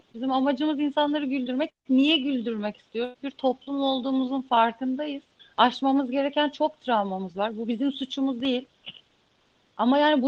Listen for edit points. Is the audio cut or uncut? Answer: cut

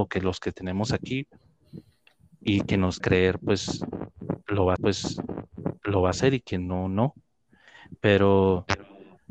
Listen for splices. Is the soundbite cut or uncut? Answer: cut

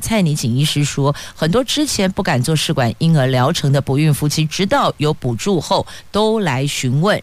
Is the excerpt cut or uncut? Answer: uncut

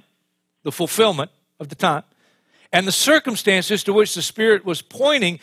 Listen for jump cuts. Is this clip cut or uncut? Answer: uncut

